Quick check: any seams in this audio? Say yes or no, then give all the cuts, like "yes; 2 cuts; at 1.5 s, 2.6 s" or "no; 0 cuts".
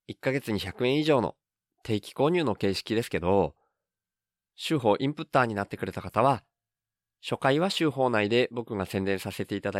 no; 0 cuts